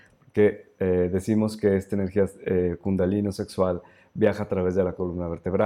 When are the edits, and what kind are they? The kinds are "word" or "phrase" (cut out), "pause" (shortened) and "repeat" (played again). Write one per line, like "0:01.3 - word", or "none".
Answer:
none